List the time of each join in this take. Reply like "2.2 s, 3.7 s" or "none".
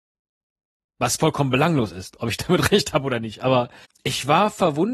3.8 s